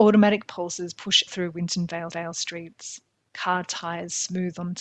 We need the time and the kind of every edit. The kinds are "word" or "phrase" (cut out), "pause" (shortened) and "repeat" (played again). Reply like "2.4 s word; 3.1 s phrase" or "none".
1.3 s word; 2.1 s repeat